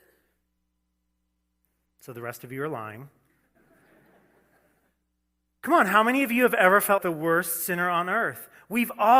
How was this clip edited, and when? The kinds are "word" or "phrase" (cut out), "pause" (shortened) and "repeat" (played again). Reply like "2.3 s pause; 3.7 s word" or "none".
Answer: 7.0 s word